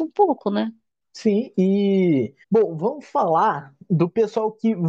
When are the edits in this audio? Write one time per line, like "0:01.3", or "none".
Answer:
0:02.4